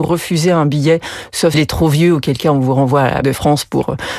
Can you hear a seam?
yes; 2 cuts; at 1.5 s, 3.2 s

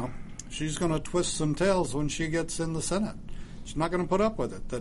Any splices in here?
no; 0 cuts

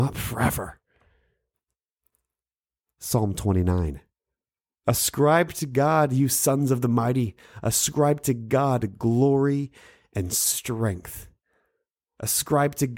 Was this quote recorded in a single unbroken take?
yes; 0 cuts

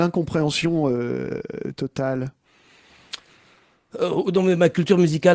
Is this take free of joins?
yes; 0 cuts

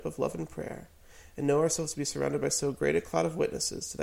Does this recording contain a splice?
no; 0 cuts

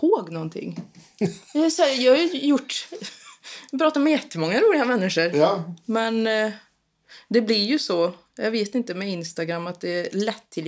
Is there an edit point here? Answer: no; 0 cuts

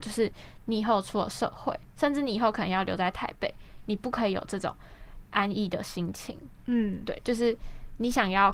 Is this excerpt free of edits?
yes; 0 cuts

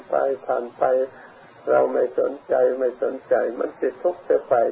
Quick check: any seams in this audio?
no; 0 cuts

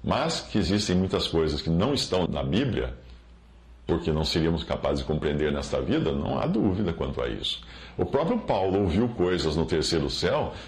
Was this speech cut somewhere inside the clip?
yes; 1 cut; at 2.3 s

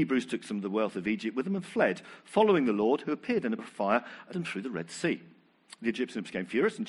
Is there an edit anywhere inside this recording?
yes; 2 cuts; at 3.6 s, 4.3 s

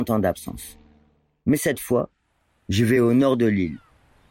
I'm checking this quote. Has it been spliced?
no; 0 cuts

